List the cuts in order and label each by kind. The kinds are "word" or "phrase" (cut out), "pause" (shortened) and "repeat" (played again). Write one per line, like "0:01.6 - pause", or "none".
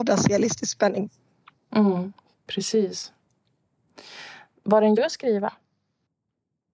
0:05.0 - word